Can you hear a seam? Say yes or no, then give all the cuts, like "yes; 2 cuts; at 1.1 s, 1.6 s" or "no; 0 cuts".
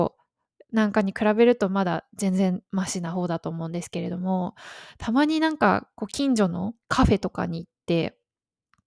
yes; 2 cuts; at 2.7 s, 6.8 s